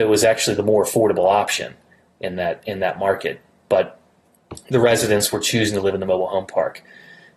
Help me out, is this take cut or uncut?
uncut